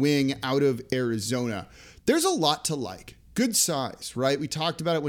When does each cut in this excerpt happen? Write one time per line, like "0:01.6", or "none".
none